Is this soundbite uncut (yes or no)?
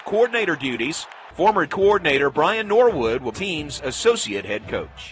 no